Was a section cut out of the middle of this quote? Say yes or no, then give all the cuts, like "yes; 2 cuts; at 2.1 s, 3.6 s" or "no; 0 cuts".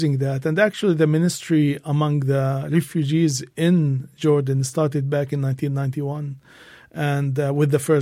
no; 0 cuts